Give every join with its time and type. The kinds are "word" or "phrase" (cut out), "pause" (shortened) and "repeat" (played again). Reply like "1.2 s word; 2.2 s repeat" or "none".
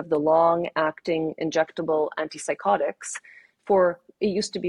none